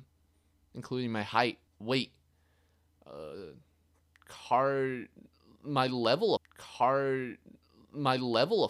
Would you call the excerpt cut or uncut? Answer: cut